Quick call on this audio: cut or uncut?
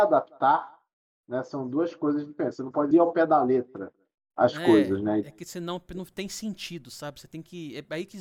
cut